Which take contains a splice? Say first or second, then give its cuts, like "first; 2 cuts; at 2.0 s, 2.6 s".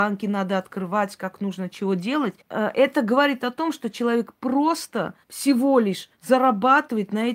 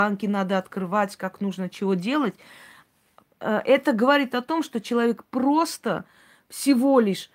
first; 3 cuts; at 2.4 s, 5.2 s, 6.1 s